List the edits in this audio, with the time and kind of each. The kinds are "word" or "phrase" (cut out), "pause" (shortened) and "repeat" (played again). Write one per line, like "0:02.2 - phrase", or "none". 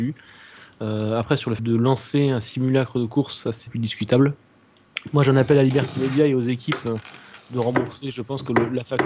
0:01.6 - word
0:03.7 - word